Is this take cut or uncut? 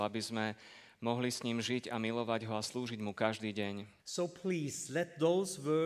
cut